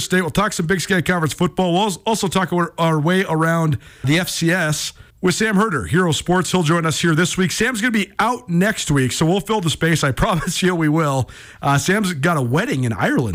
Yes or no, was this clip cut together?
yes